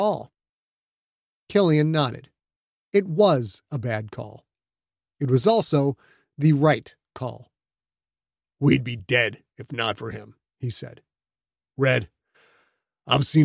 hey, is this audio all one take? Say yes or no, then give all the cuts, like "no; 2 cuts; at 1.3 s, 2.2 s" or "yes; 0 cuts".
yes; 0 cuts